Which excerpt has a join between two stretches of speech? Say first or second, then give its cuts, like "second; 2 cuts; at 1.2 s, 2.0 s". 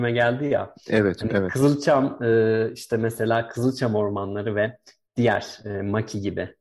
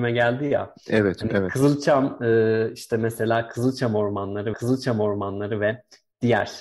second; 1 cut; at 4.5 s